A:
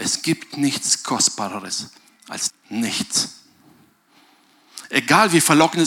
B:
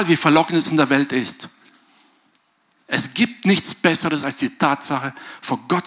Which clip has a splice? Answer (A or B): A